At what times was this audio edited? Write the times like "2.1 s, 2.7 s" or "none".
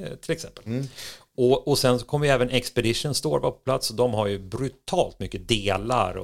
none

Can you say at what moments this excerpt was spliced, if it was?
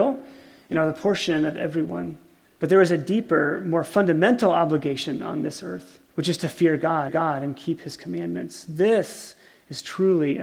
2.4 s, 6.1 s, 7.1 s

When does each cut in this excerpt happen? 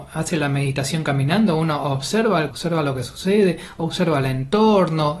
2.5 s

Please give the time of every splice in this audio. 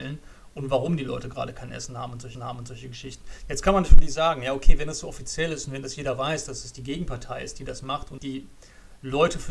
2.3 s, 8.2 s

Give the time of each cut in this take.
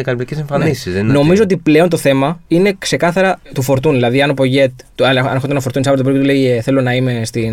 2.5 s, 3.4 s

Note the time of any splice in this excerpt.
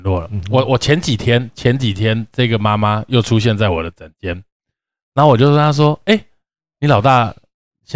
none

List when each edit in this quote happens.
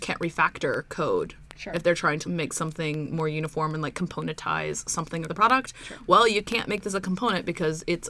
2.2 s, 5.3 s

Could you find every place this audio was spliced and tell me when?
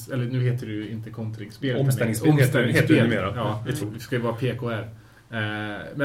3.8 s

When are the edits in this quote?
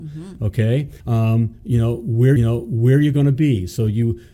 1.0 s, 2.4 s

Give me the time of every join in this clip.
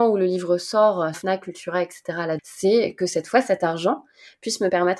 1.1 s, 2.4 s

